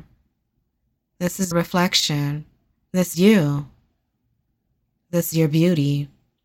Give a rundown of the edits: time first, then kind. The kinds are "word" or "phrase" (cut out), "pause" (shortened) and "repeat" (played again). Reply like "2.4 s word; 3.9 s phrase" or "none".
1.5 s word; 3.1 s word; 5.3 s word